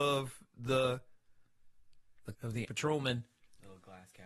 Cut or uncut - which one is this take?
cut